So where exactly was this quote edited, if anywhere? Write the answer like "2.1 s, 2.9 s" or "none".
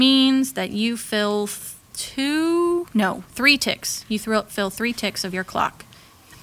1.8 s